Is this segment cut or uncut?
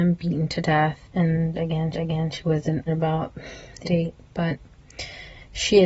cut